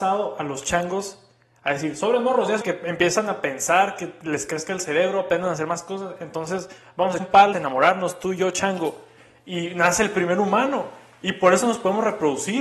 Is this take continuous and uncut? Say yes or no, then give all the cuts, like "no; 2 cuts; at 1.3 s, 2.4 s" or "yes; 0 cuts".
no; 3 cuts; at 2.6 s, 7.2 s, 7.5 s